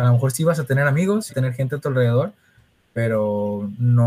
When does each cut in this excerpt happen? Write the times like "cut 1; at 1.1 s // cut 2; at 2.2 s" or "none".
cut 1; at 1.3 s